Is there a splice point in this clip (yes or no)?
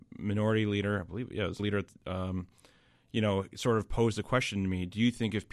yes